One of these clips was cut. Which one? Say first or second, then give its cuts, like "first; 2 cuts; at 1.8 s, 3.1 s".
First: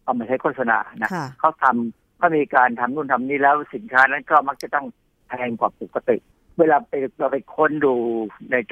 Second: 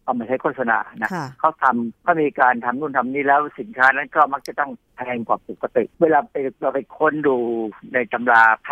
second; 3 cuts; at 1.9 s, 4.8 s, 5.9 s